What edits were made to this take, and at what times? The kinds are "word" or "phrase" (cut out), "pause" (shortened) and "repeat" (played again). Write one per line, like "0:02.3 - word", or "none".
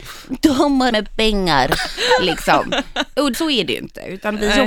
0:00.9 - word
0:03.3 - word